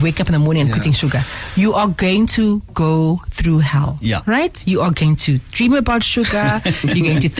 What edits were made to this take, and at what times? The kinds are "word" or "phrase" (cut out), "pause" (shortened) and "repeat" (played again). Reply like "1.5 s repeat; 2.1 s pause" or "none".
none